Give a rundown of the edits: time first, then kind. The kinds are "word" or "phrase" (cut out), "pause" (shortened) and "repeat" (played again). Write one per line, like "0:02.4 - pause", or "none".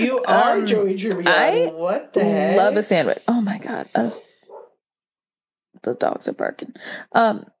none